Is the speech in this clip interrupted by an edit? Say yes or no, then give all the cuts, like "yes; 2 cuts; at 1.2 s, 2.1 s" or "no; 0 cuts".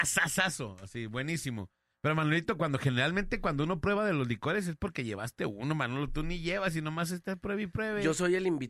no; 0 cuts